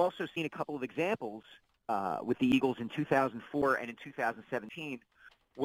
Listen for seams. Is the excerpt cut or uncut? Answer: uncut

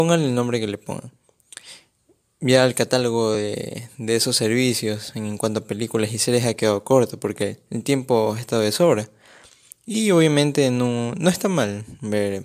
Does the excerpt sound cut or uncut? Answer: uncut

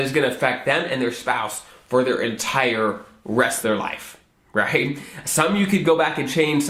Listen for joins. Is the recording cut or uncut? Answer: cut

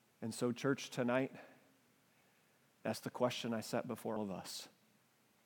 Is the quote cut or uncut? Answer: cut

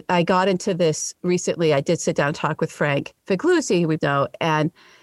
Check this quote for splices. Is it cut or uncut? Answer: cut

